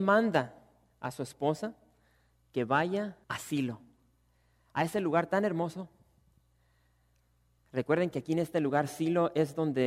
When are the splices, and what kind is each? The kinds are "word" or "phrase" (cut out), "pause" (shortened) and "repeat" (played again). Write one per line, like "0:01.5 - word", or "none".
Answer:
0:03.2 - pause